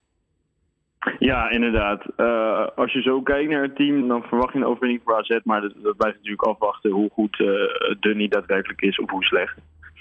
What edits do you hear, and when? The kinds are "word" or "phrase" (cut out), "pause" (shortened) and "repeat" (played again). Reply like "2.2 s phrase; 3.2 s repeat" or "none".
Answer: 4.0 s word